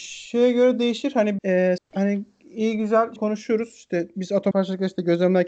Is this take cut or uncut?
cut